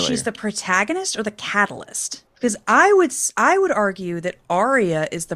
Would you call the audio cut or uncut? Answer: cut